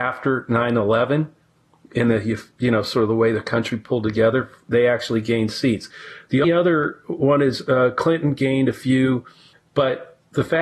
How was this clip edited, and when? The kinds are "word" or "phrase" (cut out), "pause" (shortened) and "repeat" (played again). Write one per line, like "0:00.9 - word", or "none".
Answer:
0:06.4 - word